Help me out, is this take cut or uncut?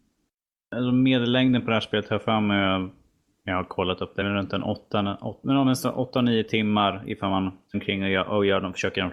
cut